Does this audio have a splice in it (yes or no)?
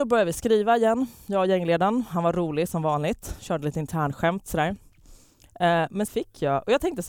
yes